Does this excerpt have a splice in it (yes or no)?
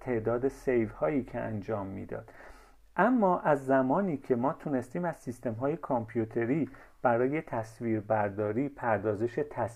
no